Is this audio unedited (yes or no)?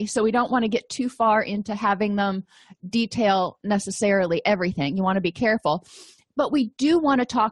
yes